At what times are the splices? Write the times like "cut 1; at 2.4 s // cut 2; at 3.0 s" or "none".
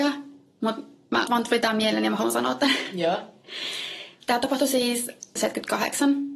cut 1; at 1.3 s // cut 2; at 5.4 s